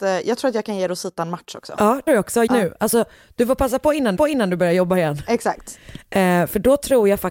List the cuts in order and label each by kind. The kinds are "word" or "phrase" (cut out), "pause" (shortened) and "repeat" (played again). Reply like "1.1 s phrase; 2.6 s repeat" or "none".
2.1 s word; 2.5 s word; 4.2 s repeat